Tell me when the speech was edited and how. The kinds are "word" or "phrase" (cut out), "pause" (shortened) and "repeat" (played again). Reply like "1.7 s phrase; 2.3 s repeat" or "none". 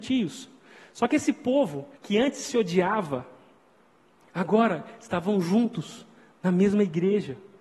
2.0 s pause